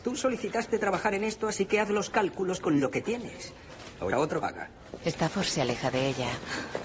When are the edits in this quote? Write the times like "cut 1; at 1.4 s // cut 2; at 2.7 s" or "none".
cut 1; at 4.1 s // cut 2; at 4.4 s

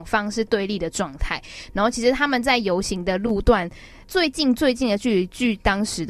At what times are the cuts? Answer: cut 1; at 4.0 s

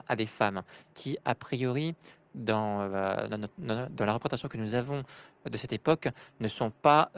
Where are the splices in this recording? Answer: none

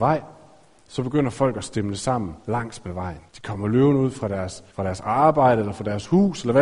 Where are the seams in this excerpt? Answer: cut 1; at 2.4 s // cut 2; at 3.3 s // cut 3; at 4.7 s

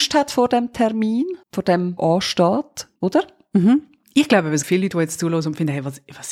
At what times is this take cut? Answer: cut 1; at 1.4 s // cut 2; at 2.0 s // cut 3; at 3.0 s // cut 4; at 4.6 s

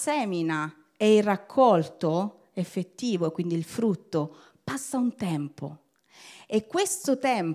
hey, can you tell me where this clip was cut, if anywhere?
none

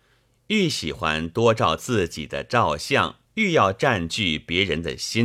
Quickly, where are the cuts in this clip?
cut 1; at 3.2 s

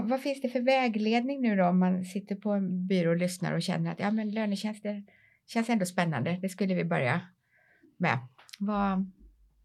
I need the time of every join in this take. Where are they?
none

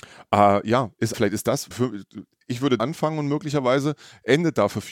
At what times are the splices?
cut 1; at 1.1 s // cut 2; at 1.7 s // cut 3; at 2.8 s

